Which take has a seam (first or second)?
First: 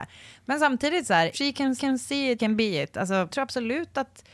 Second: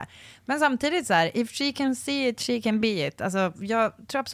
first